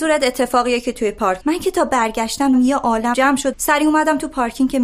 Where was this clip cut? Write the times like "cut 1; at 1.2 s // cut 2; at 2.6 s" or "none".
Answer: cut 1; at 1.4 s // cut 2; at 2.5 s // cut 3; at 3.1 s // cut 4; at 3.5 s